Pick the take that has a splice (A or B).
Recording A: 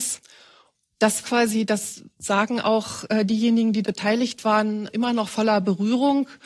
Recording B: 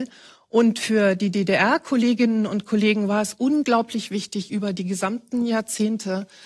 A